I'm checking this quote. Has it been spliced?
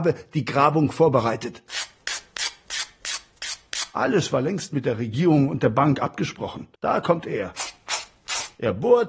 yes; 1 cut; at 6.8 s

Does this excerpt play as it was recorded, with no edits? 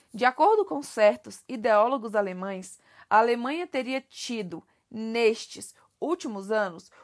yes; 0 cuts

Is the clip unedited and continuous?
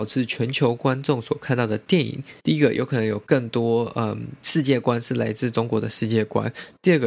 no; 2 cuts; at 2.4 s, 4.4 s

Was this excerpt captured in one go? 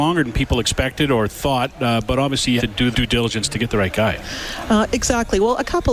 no; 2 cuts; at 2.6 s, 2.9 s

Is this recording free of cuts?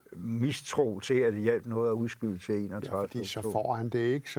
yes; 0 cuts

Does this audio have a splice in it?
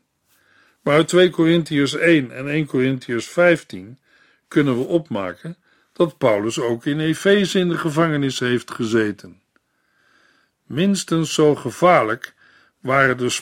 no; 0 cuts

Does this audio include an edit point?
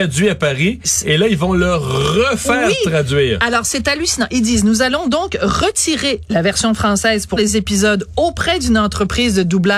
yes; 1 cut; at 7.4 s

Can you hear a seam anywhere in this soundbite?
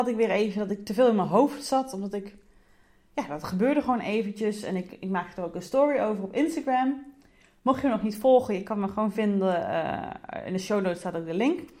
no; 0 cuts

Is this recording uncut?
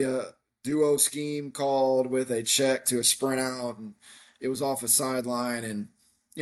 yes; 0 cuts

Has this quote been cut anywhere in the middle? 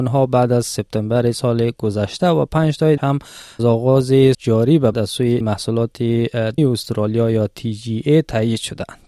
yes; 6 cuts; at 3.0 s, 3.6 s, 4.3 s, 4.9 s, 5.4 s, 6.6 s

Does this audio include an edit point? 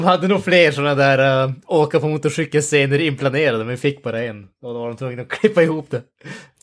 no; 0 cuts

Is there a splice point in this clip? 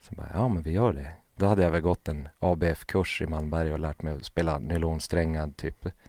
no; 0 cuts

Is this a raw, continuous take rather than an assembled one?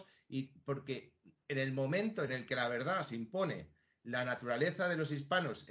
yes; 0 cuts

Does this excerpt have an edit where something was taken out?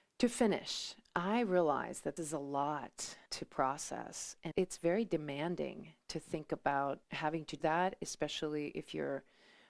yes; 5 cuts; at 2.2 s, 3.3 s, 4.5 s, 7.0 s, 7.6 s

